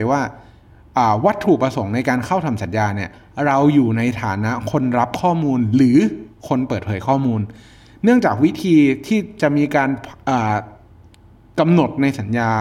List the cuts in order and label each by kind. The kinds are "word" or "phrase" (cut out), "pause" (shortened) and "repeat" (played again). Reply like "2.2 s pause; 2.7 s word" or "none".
none